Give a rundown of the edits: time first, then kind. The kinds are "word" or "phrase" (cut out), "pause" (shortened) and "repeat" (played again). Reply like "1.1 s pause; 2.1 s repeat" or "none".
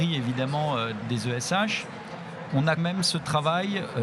1.0 s word; 2.8 s word